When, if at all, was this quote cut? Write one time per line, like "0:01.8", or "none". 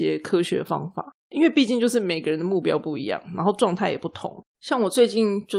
0:01.2
0:04.5